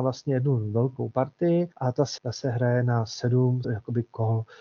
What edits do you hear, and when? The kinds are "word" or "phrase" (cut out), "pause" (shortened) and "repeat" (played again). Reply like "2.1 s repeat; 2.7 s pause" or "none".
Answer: 1.7 s pause; 2.2 s word; 3.6 s word

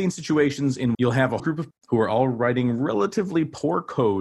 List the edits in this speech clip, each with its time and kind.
0.9 s word; 1.4 s word; 1.7 s word

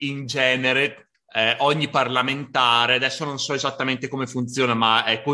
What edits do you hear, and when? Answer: 1.1 s word

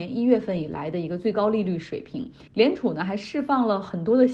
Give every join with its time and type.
2.5 s pause

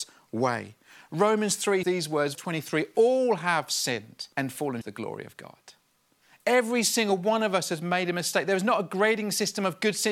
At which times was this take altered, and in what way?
1.8 s word; 2.3 s word; 4.3 s pause; 4.8 s word

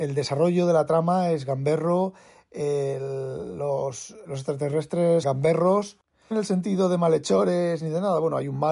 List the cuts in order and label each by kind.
4.2 s word; 5.2 s word; 6.3 s word

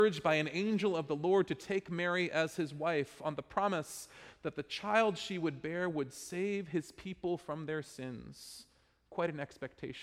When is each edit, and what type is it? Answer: none

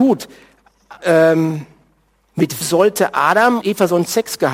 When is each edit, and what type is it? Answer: 1.0 s word; 2.6 s word; 3.6 s word

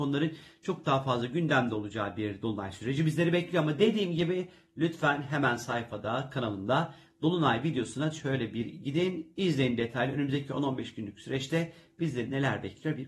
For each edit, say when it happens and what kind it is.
none

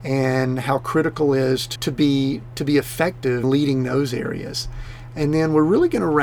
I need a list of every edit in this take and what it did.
1.8 s word; 3.4 s word

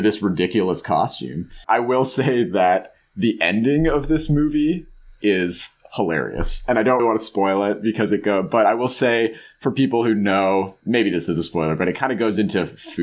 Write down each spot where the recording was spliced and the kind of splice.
7.0 s word

